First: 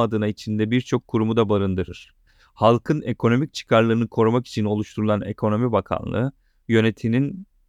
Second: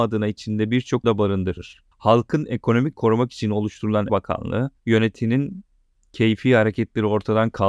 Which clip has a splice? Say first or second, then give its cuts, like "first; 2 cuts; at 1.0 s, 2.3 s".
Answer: second; 5 cuts; at 1.0 s, 1.9 s, 2.9 s, 4.1 s, 4.8 s